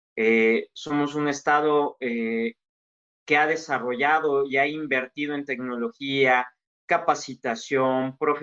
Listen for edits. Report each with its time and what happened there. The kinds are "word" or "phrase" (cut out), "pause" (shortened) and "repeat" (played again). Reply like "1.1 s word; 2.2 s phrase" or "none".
none